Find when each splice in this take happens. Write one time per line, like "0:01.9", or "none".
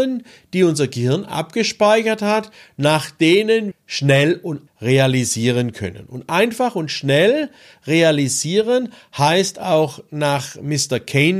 0:03.7
0:04.7